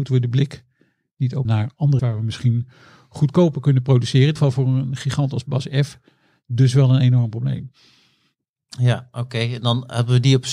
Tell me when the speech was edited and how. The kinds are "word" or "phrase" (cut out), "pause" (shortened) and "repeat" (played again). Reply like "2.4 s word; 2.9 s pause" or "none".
1.4 s phrase; 2.0 s word; 4.4 s phrase